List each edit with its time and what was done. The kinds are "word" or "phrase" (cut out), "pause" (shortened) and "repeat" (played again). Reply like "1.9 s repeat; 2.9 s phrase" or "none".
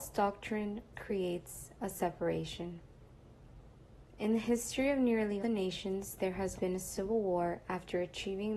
0.9 s word; 5.4 s word; 6.5 s word